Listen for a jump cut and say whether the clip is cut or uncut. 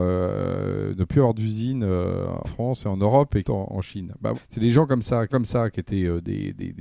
cut